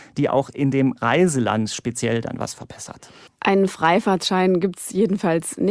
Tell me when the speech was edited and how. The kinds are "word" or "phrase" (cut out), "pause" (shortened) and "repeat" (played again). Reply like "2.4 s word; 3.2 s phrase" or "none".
3.3 s pause